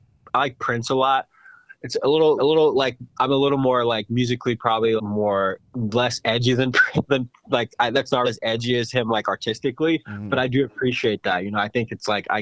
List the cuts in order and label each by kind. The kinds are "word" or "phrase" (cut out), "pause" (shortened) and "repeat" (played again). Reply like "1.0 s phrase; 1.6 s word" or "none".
2.4 s repeat; 5.0 s word; 8.2 s phrase